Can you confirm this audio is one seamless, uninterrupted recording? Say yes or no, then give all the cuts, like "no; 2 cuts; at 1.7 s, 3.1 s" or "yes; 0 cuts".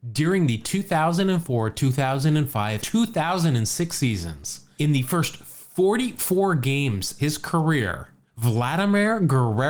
no; 4 cuts; at 2.8 s, 4.8 s, 7.2 s, 8.3 s